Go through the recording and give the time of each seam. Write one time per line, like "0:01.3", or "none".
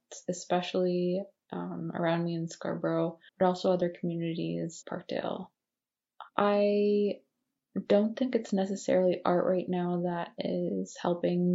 0:03.3
0:04.8
0:06.3